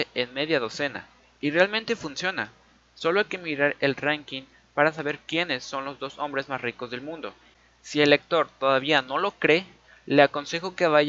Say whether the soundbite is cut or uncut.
uncut